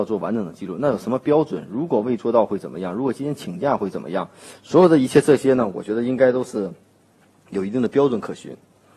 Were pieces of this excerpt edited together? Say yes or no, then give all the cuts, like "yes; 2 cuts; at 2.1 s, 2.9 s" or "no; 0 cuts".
no; 0 cuts